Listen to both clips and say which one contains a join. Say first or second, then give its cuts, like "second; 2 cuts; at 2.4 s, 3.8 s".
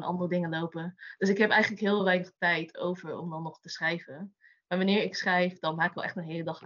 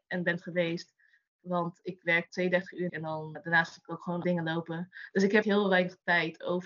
second; 5 cuts; at 2.3 s, 2.9 s, 3.3 s, 4.2 s, 5.4 s